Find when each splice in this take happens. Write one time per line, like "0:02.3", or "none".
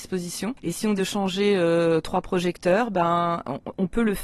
0:01.0